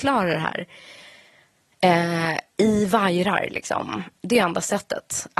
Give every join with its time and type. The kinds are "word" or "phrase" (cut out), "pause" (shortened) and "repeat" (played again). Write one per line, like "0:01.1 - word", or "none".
none